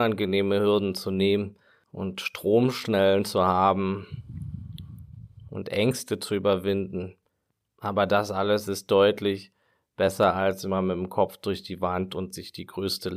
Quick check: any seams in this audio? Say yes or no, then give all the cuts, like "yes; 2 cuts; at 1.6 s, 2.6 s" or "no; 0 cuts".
no; 0 cuts